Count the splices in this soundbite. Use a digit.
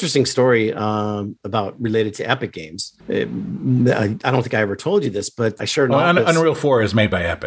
2